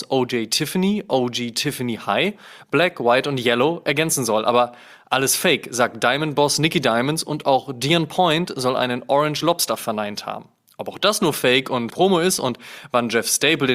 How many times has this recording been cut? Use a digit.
1